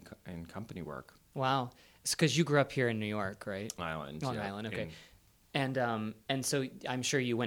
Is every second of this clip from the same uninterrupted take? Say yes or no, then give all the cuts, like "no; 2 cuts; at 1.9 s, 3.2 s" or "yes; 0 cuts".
no; 1 cut; at 3.8 s